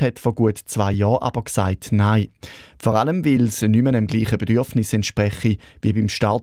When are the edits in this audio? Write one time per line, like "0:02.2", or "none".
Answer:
none